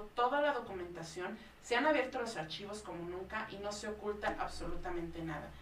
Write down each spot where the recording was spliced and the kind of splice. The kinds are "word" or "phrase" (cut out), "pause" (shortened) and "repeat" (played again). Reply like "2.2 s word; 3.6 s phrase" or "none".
none

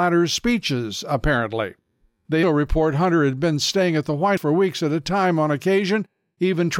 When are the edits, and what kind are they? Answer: 2.4 s word; 4.4 s word

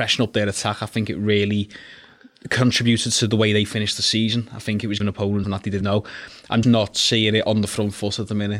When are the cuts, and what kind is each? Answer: 5.0 s word; 5.4 s word; 5.8 s word; 6.6 s word

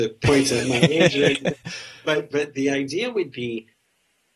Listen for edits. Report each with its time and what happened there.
2.3 s word

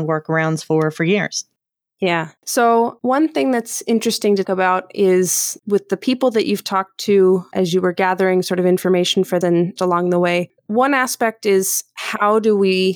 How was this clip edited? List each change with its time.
2.4 s pause; 4.4 s word; 9.4 s word; 9.8 s word; 10.6 s pause

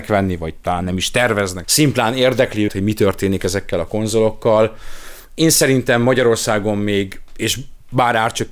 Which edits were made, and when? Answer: 1.6 s word; 2.7 s word

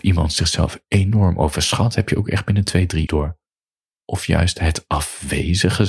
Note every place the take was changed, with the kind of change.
3.1 s word

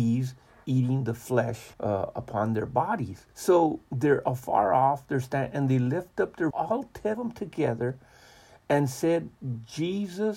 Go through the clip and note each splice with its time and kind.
1.7 s pause; 3.3 s pause; 6.5 s word; 7.1 s word

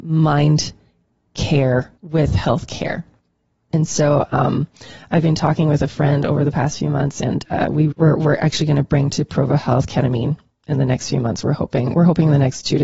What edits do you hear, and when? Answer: 2.0 s pause; 7.9 s word

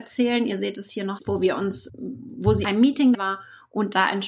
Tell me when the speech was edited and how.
1.2 s phrase; 1.9 s word; 2.6 s word; 3.1 s word

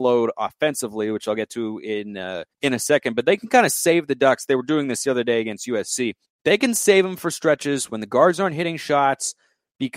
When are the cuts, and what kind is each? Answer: 2.5 s pause; 6.2 s pause

